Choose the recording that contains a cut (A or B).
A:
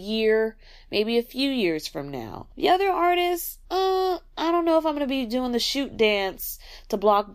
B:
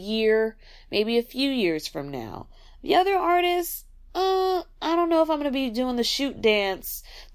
A